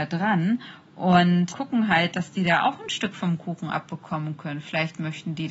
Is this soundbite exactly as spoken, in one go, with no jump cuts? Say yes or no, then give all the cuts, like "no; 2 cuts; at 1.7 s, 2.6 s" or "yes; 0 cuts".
no; 1 cut; at 1.5 s